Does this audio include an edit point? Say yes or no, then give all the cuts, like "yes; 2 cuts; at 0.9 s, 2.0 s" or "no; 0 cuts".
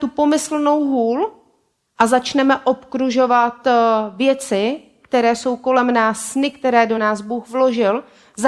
no; 0 cuts